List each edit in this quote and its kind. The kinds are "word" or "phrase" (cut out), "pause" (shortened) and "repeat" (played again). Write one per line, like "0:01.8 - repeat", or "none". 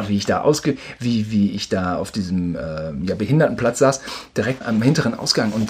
0:04.6 - word